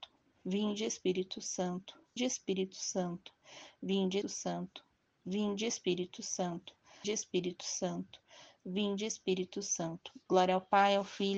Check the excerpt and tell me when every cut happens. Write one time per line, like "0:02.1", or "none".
0:02.2
0:04.2
0:07.0